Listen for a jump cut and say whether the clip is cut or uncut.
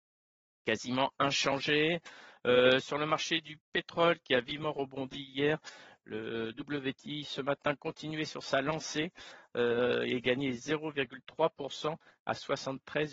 uncut